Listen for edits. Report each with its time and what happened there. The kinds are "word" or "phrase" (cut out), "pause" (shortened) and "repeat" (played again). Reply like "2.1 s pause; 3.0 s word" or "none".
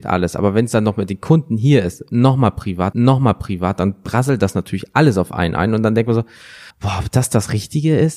2.9 s repeat; 6.7 s pause